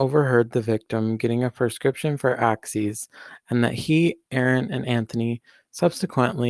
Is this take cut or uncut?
uncut